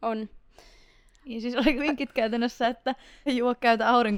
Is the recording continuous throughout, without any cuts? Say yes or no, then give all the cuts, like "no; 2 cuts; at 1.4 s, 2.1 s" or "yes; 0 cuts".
no; 2 cuts; at 1.8 s, 3.3 s